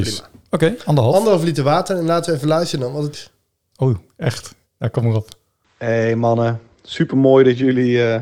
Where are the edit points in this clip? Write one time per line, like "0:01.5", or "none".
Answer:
0:03.1
0:04.6